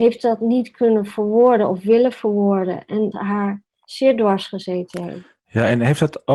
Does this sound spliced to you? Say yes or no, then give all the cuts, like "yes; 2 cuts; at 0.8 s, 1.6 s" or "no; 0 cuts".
yes; 1 cut; at 3.1 s